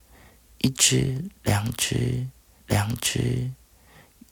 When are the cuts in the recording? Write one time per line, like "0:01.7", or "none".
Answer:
0:02.6

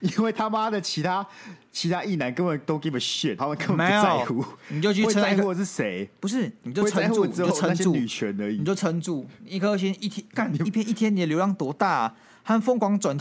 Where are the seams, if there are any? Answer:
0:03.4

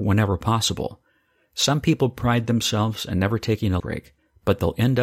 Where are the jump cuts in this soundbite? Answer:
0:03.8

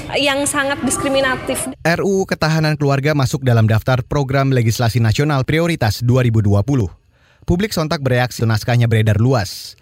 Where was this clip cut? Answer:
0:08.4

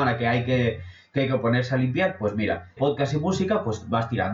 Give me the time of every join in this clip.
0:02.8

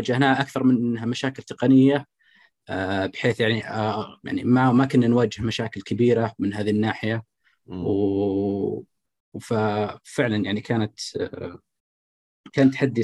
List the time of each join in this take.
none

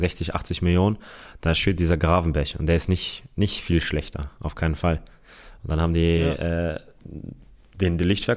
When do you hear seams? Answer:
none

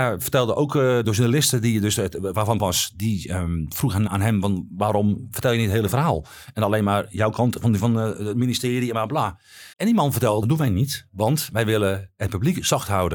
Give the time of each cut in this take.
0:01.0
0:02.6
0:04.1
0:07.8
0:09.7
0:10.4

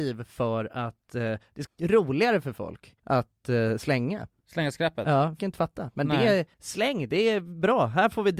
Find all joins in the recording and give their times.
0:01.7
0:03.0
0:05.4
0:06.5

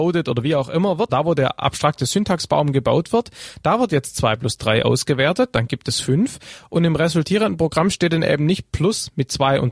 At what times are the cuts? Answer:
0:01.1

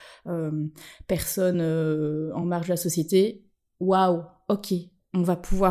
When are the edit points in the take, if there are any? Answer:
none

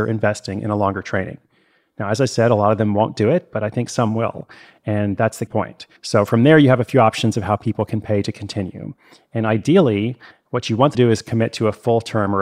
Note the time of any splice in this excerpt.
0:05.5
0:06.0
0:10.9

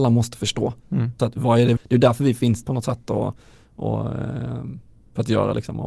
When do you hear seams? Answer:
0:01.2
0:01.8
0:02.6

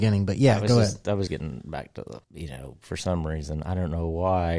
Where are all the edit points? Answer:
0:01.3
0:02.2

